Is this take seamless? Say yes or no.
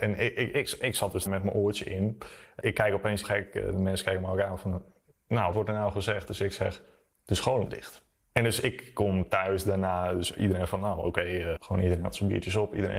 no